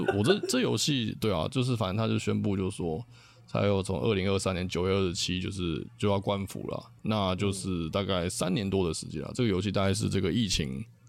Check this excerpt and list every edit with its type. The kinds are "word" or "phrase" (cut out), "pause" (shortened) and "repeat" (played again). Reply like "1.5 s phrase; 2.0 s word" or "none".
none